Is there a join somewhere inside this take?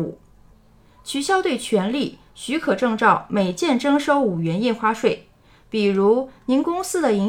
no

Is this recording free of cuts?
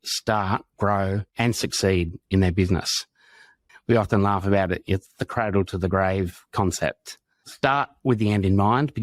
no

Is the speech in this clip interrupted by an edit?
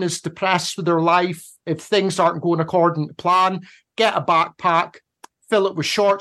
no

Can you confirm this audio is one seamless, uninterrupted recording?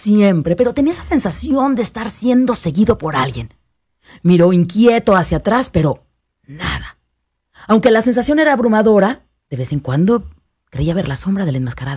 yes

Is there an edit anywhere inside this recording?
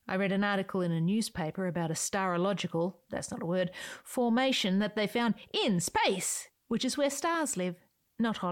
no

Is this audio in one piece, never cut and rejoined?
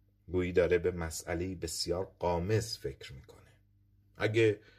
yes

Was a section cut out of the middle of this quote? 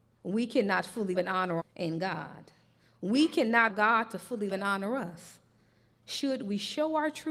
yes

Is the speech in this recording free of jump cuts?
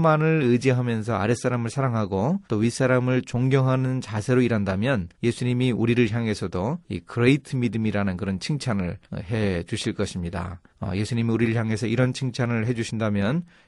no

